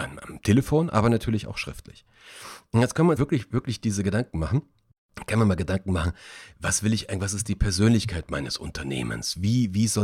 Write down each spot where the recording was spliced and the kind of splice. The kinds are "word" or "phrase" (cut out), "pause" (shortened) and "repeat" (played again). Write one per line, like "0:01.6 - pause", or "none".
0:03.2 - word